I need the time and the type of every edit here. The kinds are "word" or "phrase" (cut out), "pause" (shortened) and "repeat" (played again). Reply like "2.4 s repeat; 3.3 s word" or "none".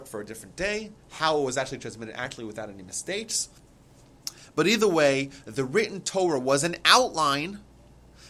none